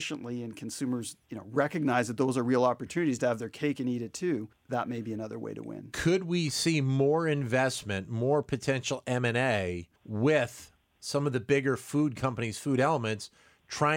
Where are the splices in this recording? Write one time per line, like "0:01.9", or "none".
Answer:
0:01.2
0:04.5
0:10.0